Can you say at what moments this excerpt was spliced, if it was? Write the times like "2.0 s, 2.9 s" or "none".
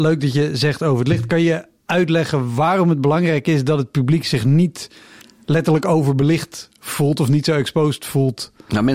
none